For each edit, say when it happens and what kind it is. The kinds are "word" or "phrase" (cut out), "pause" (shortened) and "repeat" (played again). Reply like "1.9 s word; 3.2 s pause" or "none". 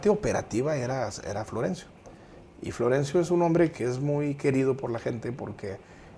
3.7 s word